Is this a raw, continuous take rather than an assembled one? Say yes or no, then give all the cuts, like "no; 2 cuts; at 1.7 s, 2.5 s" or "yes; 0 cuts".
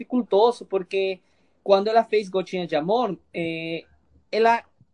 yes; 0 cuts